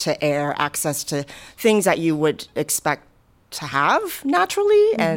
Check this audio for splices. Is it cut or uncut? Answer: uncut